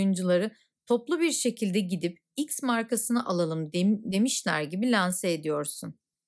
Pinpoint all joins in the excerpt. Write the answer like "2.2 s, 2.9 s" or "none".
none